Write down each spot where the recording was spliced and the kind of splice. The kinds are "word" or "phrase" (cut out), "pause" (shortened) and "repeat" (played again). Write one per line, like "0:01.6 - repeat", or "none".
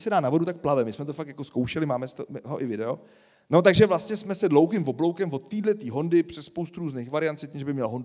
none